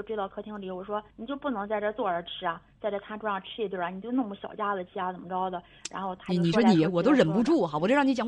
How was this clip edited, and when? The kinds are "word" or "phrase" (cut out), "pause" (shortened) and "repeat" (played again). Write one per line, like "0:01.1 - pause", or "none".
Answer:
0:01.1 - pause